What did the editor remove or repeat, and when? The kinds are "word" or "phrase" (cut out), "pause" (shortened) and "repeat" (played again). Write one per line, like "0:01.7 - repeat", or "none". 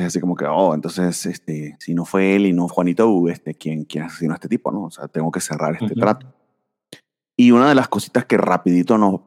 0:02.7 - word